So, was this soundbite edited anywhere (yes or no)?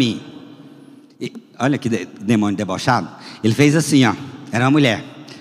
no